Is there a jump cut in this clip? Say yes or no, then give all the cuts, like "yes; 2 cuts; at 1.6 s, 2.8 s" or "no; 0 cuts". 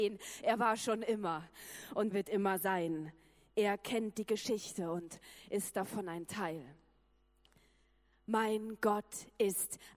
yes; 1 cut; at 2.1 s